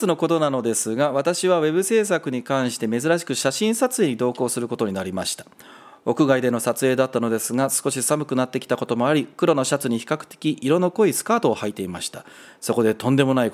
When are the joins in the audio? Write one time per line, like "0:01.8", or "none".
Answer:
none